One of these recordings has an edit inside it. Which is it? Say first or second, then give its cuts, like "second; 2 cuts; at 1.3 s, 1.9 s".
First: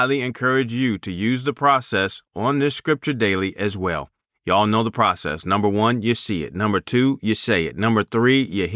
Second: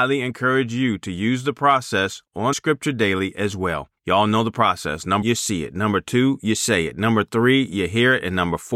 second; 3 cuts; at 2.5 s, 4.0 s, 5.2 s